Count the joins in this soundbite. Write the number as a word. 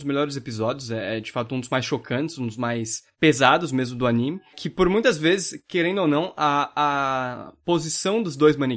zero